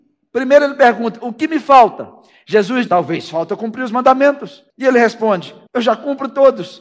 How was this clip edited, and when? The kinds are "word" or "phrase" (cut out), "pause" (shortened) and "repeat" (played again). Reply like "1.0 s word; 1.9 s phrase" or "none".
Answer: 2.9 s word; 4.7 s pause; 5.7 s pause